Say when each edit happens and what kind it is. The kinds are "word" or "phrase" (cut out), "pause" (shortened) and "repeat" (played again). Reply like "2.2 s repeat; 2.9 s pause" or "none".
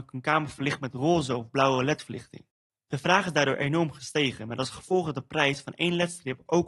none